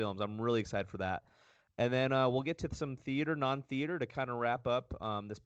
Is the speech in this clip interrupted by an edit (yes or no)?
no